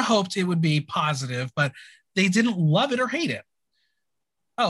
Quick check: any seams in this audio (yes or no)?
no